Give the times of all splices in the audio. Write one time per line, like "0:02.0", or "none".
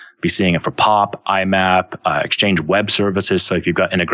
none